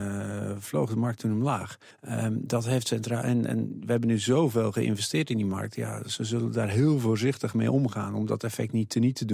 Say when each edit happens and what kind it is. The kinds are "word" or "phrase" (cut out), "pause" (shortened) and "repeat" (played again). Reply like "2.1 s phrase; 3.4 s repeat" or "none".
1.9 s pause